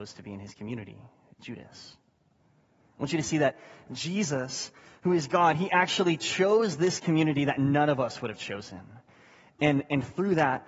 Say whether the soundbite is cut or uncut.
uncut